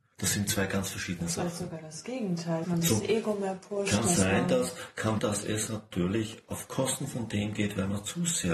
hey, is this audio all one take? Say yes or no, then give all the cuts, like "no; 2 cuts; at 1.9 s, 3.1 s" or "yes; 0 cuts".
no; 2 cuts; at 2.6 s, 5.2 s